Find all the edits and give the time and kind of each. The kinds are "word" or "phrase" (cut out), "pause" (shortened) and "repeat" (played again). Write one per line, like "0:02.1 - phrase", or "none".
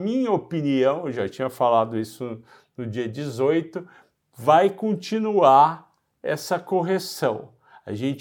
none